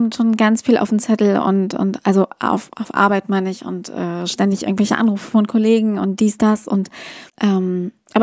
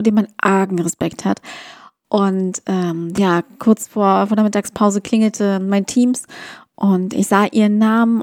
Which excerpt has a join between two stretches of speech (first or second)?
first